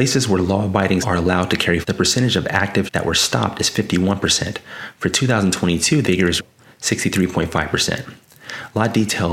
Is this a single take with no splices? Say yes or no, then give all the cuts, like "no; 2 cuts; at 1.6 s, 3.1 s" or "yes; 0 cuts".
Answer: no; 5 cuts; at 1.0 s, 1.8 s, 2.9 s, 6.0 s, 6.4 s